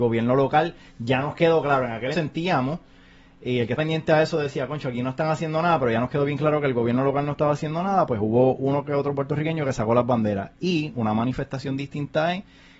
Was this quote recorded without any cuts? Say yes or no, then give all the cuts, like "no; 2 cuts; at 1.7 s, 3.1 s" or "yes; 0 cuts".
no; 2 cuts; at 2.1 s, 3.8 s